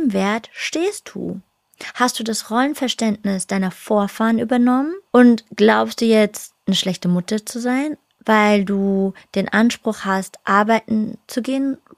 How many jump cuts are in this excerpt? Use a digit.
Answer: 1